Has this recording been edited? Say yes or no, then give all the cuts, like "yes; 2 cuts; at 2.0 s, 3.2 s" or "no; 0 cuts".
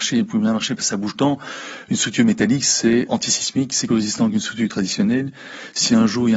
yes; 3 cuts; at 1.1 s, 3.1 s, 3.9 s